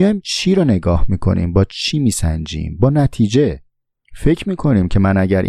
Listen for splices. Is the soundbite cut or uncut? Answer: uncut